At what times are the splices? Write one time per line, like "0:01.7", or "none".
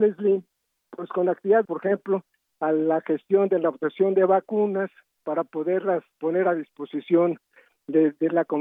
0:01.6